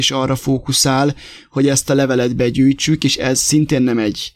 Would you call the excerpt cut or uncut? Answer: uncut